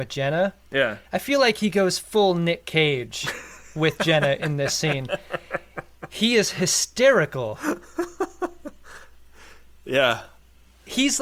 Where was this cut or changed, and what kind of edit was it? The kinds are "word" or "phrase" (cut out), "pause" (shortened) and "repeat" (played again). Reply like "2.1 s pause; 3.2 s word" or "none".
none